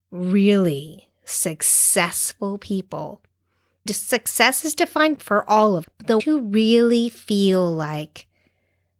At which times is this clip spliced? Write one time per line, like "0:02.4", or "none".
0:03.9
0:05.2
0:05.8
0:06.2